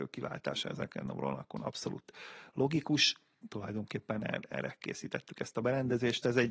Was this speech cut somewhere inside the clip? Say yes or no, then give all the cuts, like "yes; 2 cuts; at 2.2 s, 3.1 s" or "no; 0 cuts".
no; 0 cuts